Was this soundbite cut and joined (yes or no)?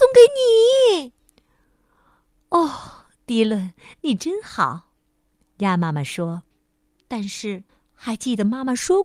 yes